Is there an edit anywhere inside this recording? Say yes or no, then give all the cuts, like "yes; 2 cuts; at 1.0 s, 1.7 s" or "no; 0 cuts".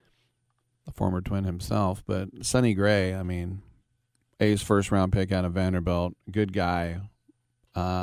no; 0 cuts